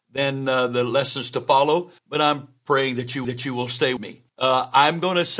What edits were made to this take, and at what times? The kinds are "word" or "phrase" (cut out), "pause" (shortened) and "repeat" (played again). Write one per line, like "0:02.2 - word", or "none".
0:02.0 - pause
0:03.2 - repeat
0:04.0 - word
0:04.3 - pause